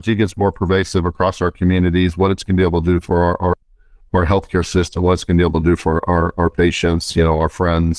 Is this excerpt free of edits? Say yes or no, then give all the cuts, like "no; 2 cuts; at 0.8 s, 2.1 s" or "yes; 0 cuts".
yes; 0 cuts